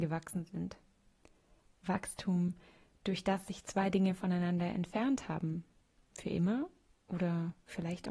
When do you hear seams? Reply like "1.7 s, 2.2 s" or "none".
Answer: none